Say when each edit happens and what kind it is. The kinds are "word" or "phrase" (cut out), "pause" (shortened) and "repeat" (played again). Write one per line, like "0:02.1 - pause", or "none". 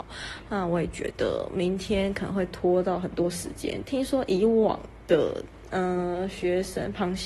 none